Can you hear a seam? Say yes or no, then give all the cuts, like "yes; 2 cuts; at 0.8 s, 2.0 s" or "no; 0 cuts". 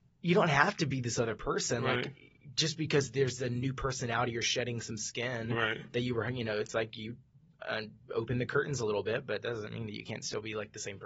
no; 0 cuts